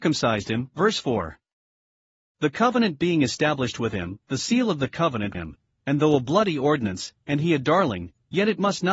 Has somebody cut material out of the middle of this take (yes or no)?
yes